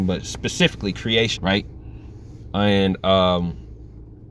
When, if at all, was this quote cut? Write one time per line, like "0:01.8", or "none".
0:01.4